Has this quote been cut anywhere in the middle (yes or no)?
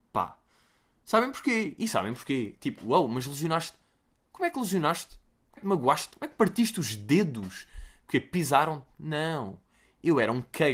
yes